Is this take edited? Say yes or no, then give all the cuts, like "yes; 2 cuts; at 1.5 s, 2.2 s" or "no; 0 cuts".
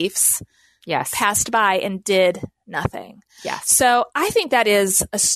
yes; 1 cut; at 4.1 s